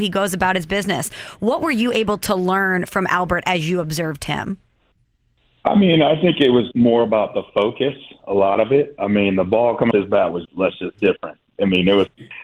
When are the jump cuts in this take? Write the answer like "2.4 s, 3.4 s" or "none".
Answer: 6.7 s, 9.9 s, 10.4 s, 10.9 s